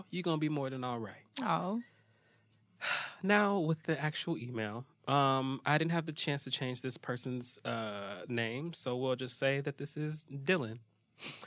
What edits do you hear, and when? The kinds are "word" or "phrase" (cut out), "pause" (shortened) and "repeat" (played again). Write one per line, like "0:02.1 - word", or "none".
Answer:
0:01.3 - pause